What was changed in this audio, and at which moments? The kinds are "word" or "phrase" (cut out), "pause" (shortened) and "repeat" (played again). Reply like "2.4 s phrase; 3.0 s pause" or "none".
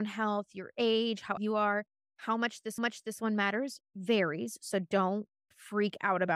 1.4 s word; 2.8 s repeat

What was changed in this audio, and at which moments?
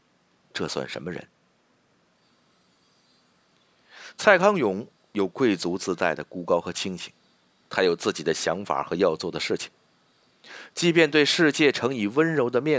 none

